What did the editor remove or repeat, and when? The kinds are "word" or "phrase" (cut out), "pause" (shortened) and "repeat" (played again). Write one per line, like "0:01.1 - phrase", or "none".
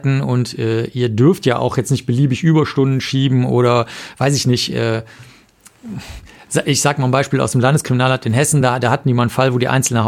none